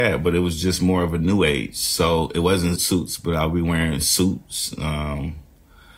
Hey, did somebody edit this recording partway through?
yes; 1 cut; at 2.8 s

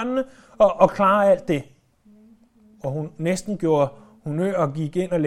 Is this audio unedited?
yes; 0 cuts

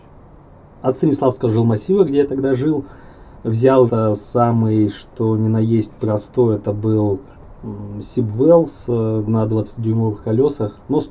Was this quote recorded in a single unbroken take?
no; 1 cut; at 3.9 s

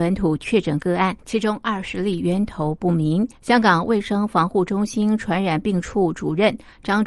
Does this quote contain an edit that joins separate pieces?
yes; 2 cuts; at 1.2 s, 3.3 s

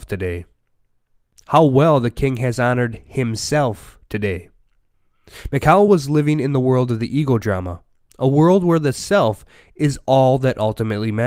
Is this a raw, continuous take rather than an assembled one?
yes; 0 cuts

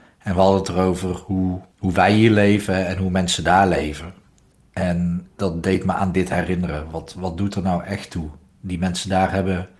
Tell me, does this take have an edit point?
yes; 2 cuts; at 1.7 s, 5.3 s

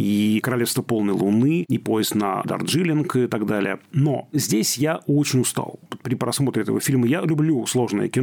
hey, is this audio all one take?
yes; 0 cuts

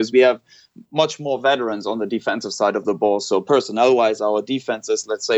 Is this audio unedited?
yes; 0 cuts

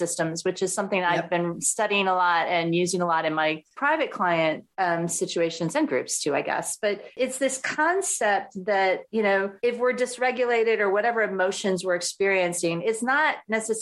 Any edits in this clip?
yes; 5 cuts; at 3.7 s, 4.7 s, 7.1 s, 9.1 s, 9.6 s

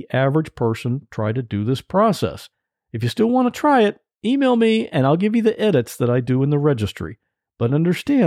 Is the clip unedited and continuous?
yes; 0 cuts

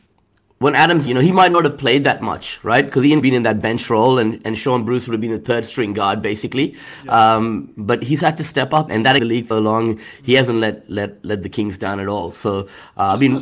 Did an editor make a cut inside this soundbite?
yes; 5 cuts; at 1.1 s, 3.2 s, 8.9 s, 9.2 s, 9.5 s

